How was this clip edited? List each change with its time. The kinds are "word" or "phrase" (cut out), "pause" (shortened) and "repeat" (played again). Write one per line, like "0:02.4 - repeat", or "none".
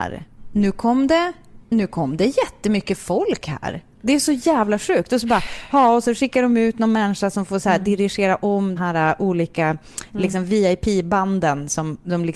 0:01.6 - pause
0:08.8 - word